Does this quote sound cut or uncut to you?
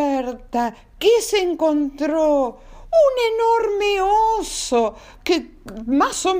uncut